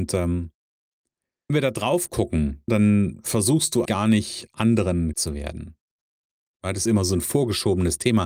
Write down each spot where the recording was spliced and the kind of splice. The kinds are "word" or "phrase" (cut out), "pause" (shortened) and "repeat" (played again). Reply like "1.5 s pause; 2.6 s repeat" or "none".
1.5 s word; 2.7 s word; 3.9 s word; 5.1 s word; 6.9 s word

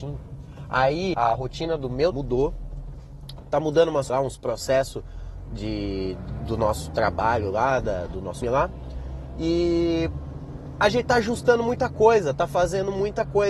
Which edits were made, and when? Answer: 1.1 s word; 2.1 s word; 4.1 s word; 6.4 s word; 8.4 s word

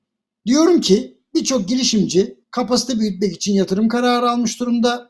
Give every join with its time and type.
2.4 s pause

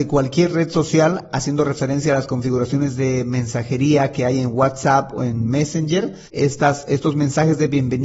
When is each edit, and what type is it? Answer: 6.3 s pause

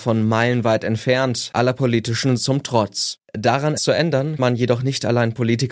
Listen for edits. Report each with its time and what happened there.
2.4 s word; 3.8 s word; 4.4 s word

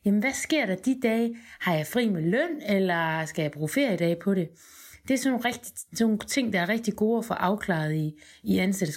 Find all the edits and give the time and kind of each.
none

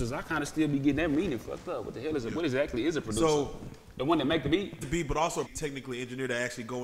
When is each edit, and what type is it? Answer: 4.8 s phrase; 5.5 s phrase

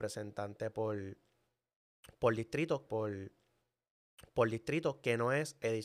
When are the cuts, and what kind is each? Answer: 2.9 s repeat

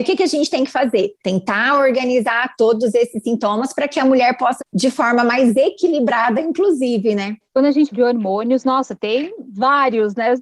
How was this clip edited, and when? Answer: 1.2 s pause; 4.6 s word; 7.5 s pause; 7.9 s word

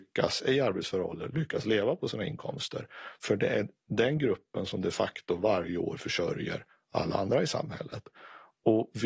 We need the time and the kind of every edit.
none

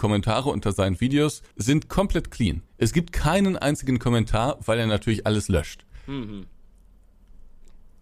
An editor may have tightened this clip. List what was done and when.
1.5 s pause; 2.7 s pause

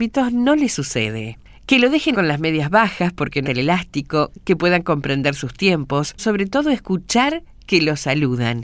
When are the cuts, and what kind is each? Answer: 2.1 s word; 3.4 s word; 6.2 s word

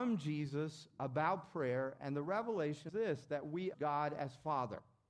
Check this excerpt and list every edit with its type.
2.9 s word; 3.7 s word

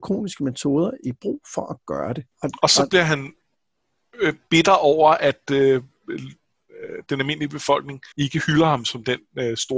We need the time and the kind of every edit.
2.3 s pause; 8.1 s pause

